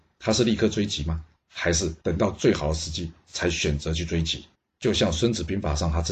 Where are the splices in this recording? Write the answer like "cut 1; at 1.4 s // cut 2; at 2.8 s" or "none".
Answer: cut 1; at 2.0 s // cut 2; at 4.5 s

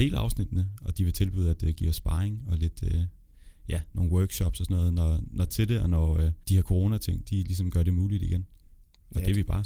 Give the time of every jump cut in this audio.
cut 1; at 5.5 s // cut 2; at 6.4 s

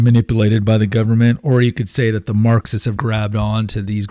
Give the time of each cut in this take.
cut 1; at 3.0 s

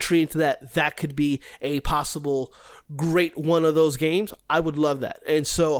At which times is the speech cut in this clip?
none

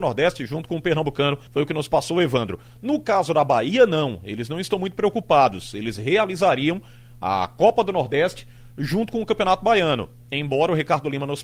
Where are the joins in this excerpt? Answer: cut 1; at 1.5 s

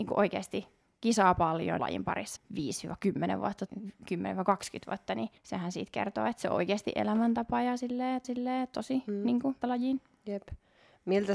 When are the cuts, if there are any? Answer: cut 1; at 1.8 s // cut 2; at 2.4 s // cut 3; at 3.7 s // cut 4; at 5.4 s // cut 5; at 8.2 s // cut 6; at 9.6 s

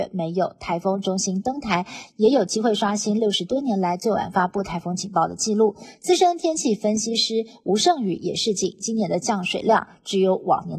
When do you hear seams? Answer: none

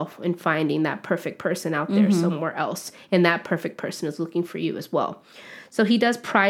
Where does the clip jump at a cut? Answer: none

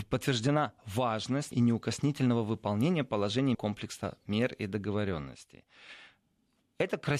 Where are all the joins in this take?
cut 1; at 1.5 s // cut 2; at 3.5 s

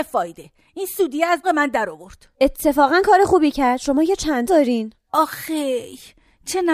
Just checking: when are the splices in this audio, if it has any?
cut 1; at 1.4 s // cut 2; at 4.5 s

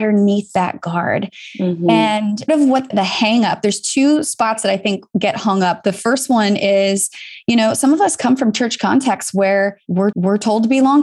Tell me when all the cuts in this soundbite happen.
cut 1; at 2.5 s // cut 2; at 2.9 s // cut 3; at 10.1 s

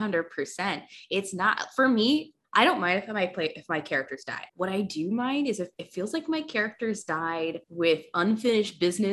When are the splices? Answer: cut 1; at 2.4 s // cut 2; at 4.5 s // cut 3; at 5.7 s // cut 4; at 7.6 s

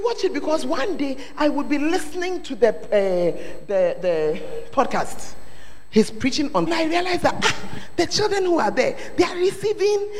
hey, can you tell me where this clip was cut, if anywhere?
cut 1; at 6.7 s

